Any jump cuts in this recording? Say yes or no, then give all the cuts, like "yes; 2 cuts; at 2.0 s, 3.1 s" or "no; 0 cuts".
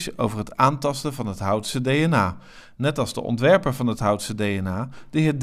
no; 0 cuts